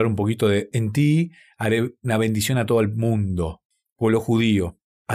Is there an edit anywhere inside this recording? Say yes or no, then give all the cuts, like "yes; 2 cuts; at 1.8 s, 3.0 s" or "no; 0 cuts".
no; 0 cuts